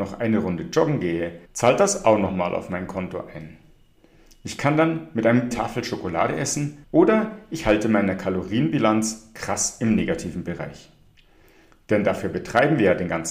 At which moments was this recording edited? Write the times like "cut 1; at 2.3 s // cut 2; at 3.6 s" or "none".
cut 1; at 1.4 s // cut 2; at 5.5 s // cut 3; at 6.8 s

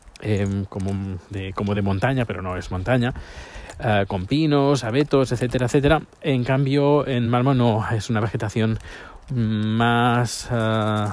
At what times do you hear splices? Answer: none

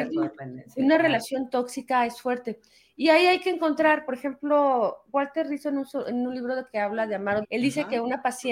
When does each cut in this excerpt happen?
cut 1; at 7.4 s

